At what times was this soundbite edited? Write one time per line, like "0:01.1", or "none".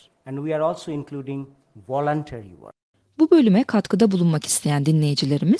none

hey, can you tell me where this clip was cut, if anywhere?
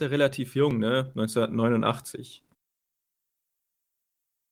none

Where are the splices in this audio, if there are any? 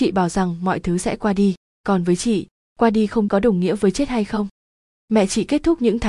0:03.3

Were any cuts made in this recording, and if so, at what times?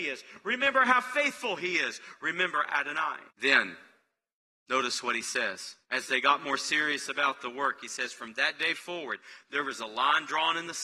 0:03.3
0:05.8

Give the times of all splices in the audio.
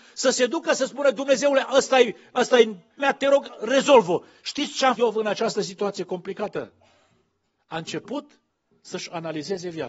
0:03.0
0:05.0

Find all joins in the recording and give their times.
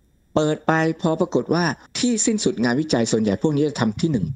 0:01.9

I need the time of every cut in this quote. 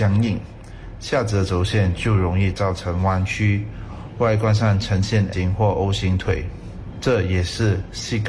0:05.3

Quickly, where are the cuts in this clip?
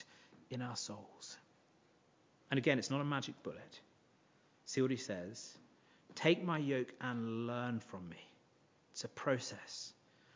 none

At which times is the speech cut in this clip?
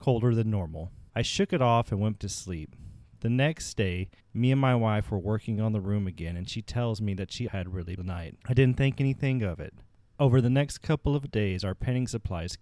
0:01.1
0:02.2
0:04.2
0:07.5
0:08.0
0:08.4

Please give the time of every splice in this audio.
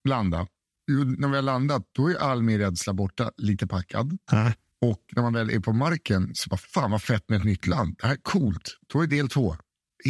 none

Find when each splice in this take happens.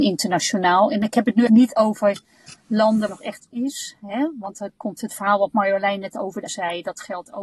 0:01.5
0:03.1
0:03.5
0:06.5

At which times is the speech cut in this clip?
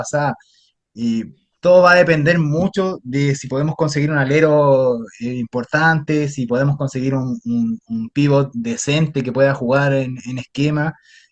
none

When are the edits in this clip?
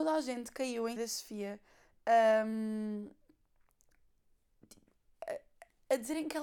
0:01.0

